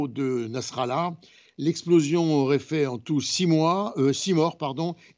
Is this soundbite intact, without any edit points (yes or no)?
yes